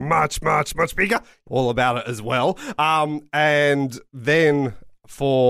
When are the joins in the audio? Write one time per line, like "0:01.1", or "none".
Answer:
0:01.5